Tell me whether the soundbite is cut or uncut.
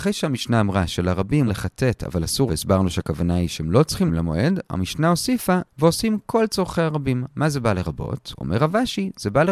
cut